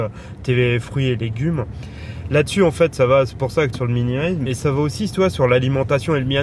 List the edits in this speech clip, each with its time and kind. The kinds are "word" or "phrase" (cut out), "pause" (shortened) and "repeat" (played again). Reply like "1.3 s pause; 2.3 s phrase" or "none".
3.7 s phrase; 4.5 s word